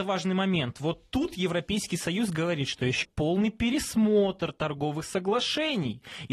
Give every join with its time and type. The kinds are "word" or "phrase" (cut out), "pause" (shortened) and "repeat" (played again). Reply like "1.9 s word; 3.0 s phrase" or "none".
3.0 s phrase